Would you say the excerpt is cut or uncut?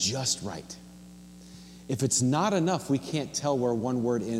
uncut